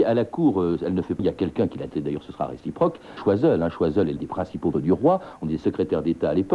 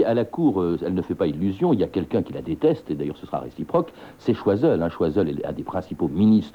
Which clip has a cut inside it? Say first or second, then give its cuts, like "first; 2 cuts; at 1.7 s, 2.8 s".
first; 5 cuts; at 1.2 s, 1.9 s, 3.2 s, 4.2 s, 4.7 s